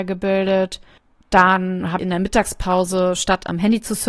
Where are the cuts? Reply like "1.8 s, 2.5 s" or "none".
2.0 s